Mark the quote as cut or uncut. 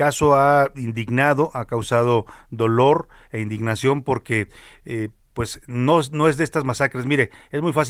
uncut